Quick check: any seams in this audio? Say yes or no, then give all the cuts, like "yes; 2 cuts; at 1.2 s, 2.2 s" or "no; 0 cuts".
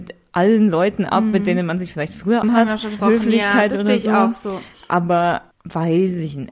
yes; 3 cuts; at 2.4 s, 3.0 s, 5.5 s